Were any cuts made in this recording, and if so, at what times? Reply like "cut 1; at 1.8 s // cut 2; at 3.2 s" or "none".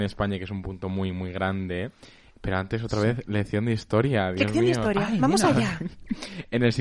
none